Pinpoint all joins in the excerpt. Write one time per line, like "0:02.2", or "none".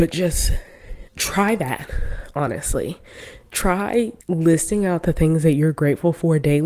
0:01.1
0:04.2